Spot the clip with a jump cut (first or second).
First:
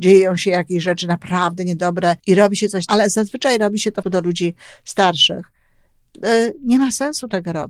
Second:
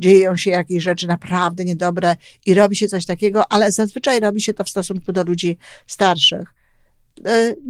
first